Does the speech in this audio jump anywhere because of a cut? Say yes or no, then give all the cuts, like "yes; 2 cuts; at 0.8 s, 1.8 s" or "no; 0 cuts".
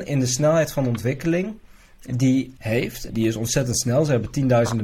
yes; 2 cuts; at 2.6 s, 3.1 s